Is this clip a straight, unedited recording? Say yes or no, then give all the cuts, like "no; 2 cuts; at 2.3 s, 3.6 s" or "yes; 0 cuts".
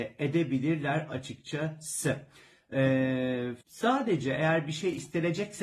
no; 1 cut; at 3.6 s